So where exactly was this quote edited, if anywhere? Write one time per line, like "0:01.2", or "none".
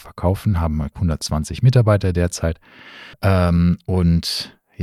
0:00.9
0:03.1